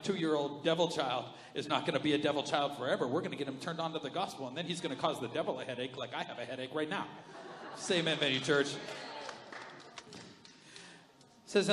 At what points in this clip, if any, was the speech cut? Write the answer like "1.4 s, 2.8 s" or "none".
none